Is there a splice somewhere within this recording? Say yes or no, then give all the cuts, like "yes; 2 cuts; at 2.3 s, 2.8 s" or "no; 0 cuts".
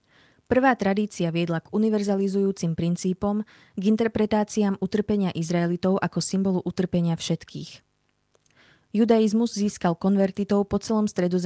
no; 0 cuts